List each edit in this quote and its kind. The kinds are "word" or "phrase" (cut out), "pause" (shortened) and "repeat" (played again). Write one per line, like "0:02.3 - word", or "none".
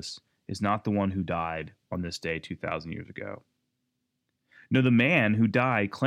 none

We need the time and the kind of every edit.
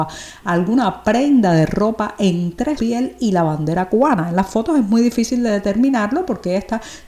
0:02.8 - word

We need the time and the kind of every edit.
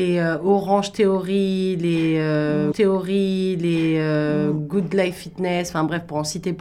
0:02.7 - repeat

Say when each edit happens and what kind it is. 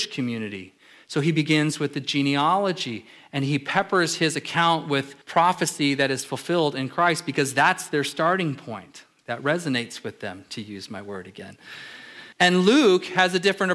0:05.2 - pause
0:12.3 - pause

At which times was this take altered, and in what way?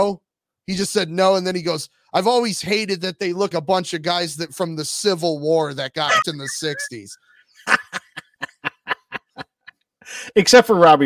0:03.5 - word
0:06.2 - word

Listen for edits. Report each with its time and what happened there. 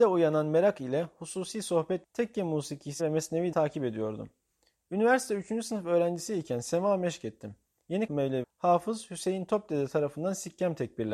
0:02.0 - word
0:03.0 - word
0:03.5 - word
0:08.1 - word
0:08.4 - word

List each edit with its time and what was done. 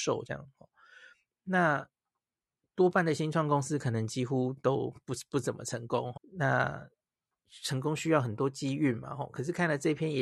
0:06.2 - word

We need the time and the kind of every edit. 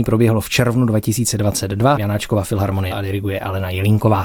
0:01.9 - word
0:02.9 - word

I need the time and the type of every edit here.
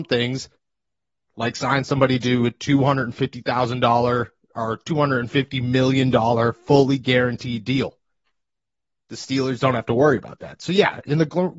none

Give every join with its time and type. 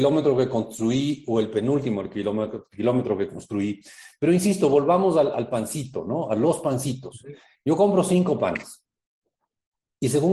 none

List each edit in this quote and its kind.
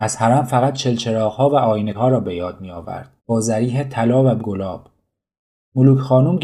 0:01.9 - word
0:03.2 - pause
0:04.4 - word

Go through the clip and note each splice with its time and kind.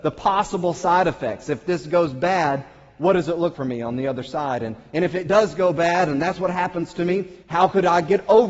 0:03.5 - word
0:07.4 - pause

